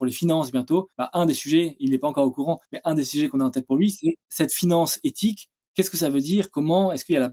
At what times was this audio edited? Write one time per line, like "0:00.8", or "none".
0:00.9
0:02.6
0:04.2